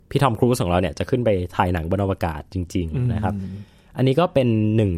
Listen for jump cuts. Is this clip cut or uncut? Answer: uncut